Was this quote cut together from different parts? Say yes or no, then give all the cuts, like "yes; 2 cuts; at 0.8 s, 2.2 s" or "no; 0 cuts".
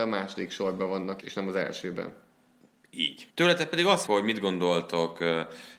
yes; 3 cuts; at 1.2 s, 3.3 s, 4.1 s